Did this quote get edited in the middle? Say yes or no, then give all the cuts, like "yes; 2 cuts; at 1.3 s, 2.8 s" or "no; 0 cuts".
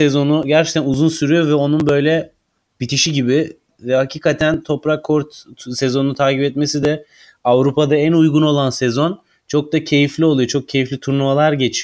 no; 0 cuts